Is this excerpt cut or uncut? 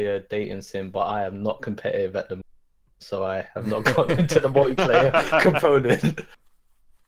uncut